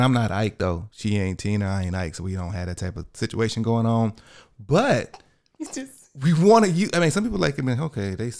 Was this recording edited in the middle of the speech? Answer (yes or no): no